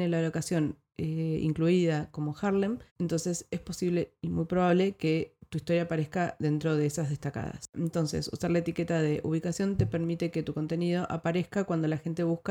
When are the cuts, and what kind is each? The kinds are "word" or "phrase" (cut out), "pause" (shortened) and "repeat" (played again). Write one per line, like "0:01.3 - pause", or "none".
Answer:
0:02.9 - pause